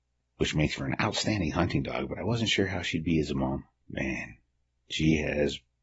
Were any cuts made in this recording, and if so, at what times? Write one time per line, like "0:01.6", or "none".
none